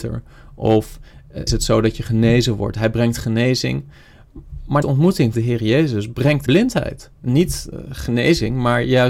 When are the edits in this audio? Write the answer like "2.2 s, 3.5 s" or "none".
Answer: 1.5 s, 4.8 s, 5.3 s, 6.5 s, 7.1 s